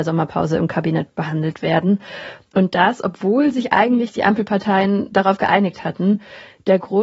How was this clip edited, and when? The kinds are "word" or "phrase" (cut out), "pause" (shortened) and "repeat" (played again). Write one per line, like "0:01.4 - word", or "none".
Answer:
none

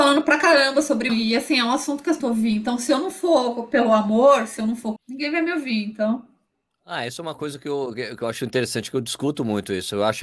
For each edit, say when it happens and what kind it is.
0:01.1 - phrase
0:02.2 - phrase
0:05.0 - phrase

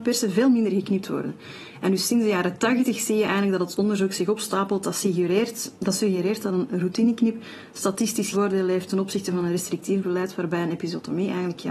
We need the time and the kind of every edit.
0:08.3 - word

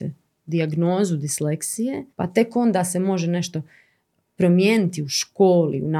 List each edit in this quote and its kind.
0:02.1 - pause

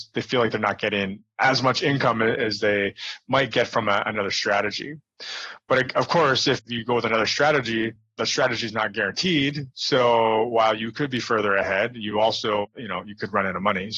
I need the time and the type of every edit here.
none

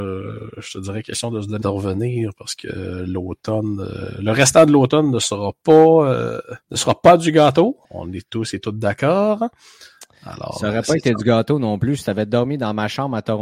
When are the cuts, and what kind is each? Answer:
0:01.6 - phrase
0:06.6 - pause
0:07.8 - pause

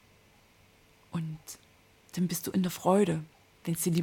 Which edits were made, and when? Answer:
none

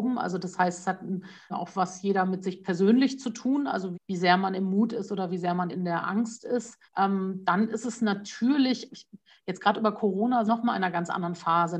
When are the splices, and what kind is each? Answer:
0:01.5 - word
0:03.9 - word
0:05.7 - word
0:06.8 - pause
0:08.9 - word
0:10.4 - phrase

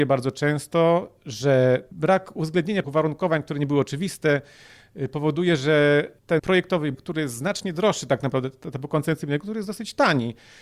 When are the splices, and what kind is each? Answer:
0:02.8 - word
0:06.4 - word
0:06.9 - word

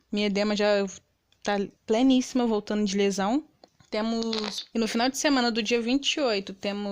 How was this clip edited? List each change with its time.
0:01.8 - pause

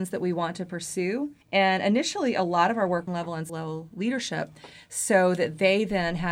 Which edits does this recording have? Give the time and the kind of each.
0:01.4 - pause
0:03.1 - phrase
0:03.5 - word

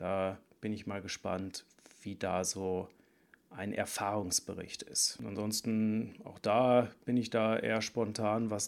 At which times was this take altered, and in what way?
none

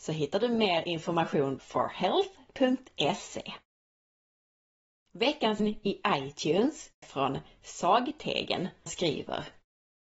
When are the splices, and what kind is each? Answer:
0:01.6 - word
0:05.6 - word
0:07.0 - word
0:08.9 - word

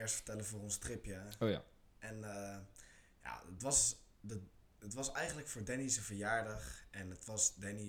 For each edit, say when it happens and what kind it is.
none

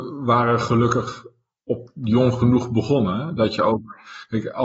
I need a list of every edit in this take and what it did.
none

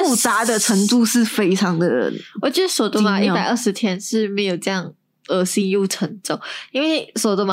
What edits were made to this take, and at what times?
none

